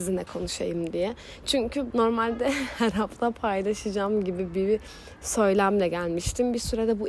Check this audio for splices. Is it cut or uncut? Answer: cut